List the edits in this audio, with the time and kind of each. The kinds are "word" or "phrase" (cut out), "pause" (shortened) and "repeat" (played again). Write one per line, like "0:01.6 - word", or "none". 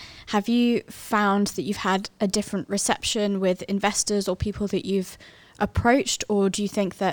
none